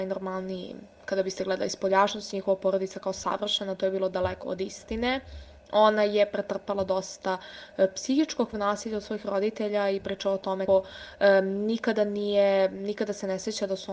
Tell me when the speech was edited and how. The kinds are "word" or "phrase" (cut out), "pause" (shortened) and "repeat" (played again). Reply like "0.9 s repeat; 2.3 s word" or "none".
0.9 s pause; 4.4 s word; 8.5 s word; 10.7 s word